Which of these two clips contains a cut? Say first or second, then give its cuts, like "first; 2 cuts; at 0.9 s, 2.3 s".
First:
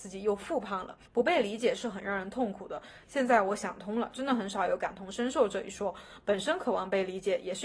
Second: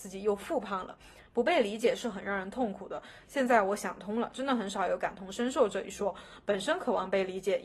first; 1 cut; at 1.1 s